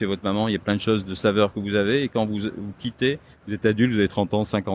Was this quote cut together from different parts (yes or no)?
no